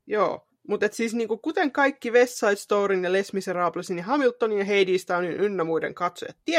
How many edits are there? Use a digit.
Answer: 0